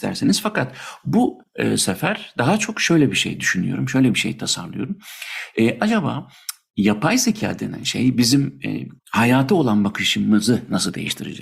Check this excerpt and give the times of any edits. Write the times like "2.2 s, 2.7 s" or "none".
none